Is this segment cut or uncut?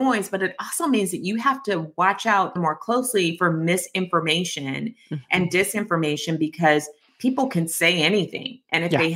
cut